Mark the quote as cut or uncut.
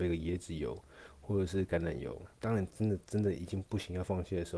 cut